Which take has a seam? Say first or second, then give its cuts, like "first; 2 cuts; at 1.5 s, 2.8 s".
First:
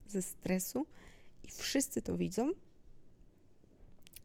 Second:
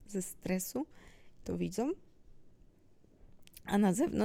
second; 1 cut; at 1.4 s